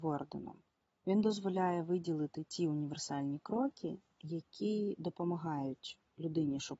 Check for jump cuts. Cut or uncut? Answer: uncut